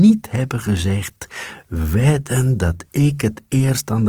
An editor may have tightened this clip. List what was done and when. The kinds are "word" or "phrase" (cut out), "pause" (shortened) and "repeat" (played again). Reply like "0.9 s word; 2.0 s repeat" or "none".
none